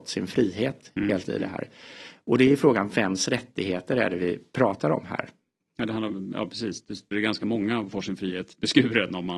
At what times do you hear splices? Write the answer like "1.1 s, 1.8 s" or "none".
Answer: 1.2 s, 7.1 s, 7.9 s